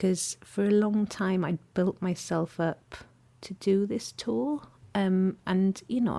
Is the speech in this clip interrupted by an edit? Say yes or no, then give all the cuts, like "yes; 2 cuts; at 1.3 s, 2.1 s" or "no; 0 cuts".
no; 0 cuts